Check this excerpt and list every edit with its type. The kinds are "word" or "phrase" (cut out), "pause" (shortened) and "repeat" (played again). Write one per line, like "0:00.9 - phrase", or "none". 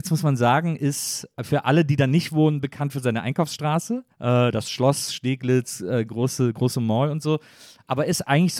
0:04.1 - pause

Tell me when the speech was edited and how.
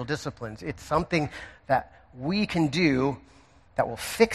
none

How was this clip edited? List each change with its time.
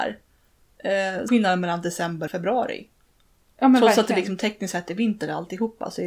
0:01.3 - word
0:02.3 - word

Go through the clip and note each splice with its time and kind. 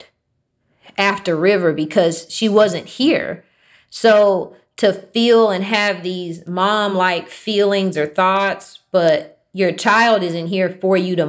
none

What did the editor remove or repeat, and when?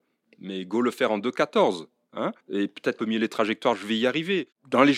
0:02.4 - pause
0:03.0 - phrase

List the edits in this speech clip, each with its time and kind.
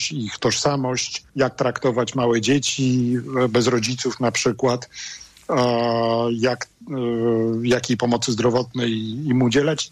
0:01.3 - pause

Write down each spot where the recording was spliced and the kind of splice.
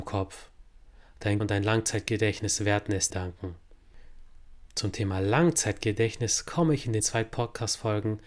0:01.4 - word
0:03.1 - word
0:07.0 - word

